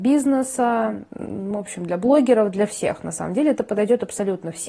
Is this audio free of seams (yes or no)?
yes